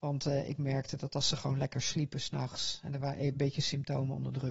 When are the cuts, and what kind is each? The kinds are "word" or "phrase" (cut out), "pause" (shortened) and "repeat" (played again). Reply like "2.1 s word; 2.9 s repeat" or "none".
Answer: none